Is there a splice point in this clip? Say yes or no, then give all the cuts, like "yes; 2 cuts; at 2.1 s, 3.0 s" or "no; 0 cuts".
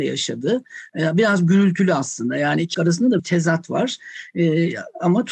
yes; 2 cuts; at 2.7 s, 3.2 s